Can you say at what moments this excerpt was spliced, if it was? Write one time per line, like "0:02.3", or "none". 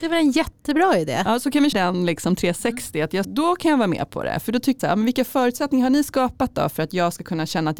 0:01.7
0:03.2
0:04.8